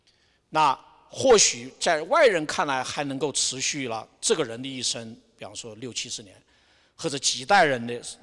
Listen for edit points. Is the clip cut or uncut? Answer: uncut